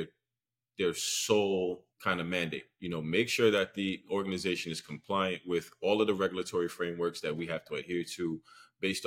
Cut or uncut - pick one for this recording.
cut